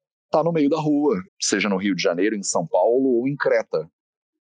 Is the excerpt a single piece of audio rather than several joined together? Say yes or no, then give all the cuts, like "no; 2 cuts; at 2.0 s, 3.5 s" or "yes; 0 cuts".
no; 1 cut; at 1.3 s